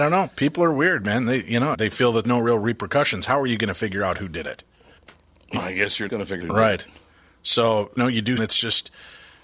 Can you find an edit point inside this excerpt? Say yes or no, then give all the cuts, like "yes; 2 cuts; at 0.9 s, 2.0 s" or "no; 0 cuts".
yes; 7 cuts; at 1.7 s, 2.2 s, 5.6 s, 6.1 s, 6.4 s, 8.0 s, 8.4 s